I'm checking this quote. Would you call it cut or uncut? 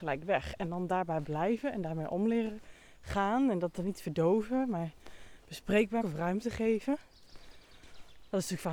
cut